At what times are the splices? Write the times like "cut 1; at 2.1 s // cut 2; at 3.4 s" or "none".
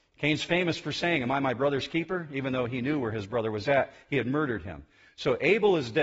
none